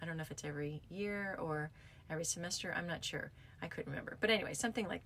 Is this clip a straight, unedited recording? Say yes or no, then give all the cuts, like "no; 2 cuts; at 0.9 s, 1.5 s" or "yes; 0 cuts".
yes; 0 cuts